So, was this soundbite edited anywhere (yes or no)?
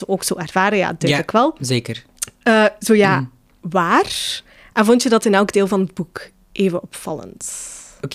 no